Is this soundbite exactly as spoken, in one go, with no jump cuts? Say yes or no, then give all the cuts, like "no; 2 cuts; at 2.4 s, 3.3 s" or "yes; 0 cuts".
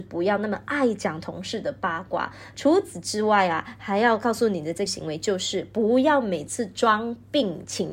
no; 1 cut; at 4.9 s